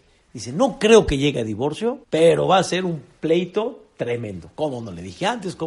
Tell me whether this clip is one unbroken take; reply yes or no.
no